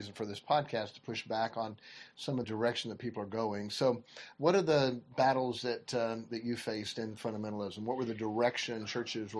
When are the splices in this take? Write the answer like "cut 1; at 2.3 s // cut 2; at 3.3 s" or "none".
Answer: cut 1; at 2.4 s